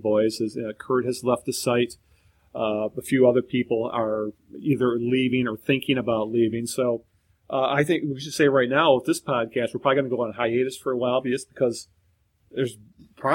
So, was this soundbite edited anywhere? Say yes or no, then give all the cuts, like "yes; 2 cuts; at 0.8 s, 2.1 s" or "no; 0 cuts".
no; 0 cuts